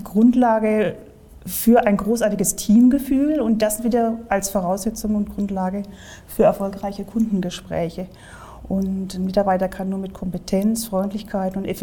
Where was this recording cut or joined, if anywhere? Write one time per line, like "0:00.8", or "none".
none